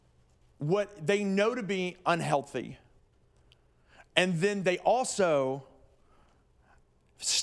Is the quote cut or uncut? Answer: uncut